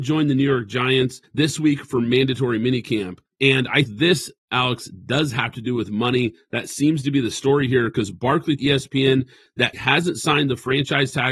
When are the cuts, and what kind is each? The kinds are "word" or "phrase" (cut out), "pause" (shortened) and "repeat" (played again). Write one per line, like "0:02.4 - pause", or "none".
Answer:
0:03.8 - word
0:08.6 - word
0:09.7 - word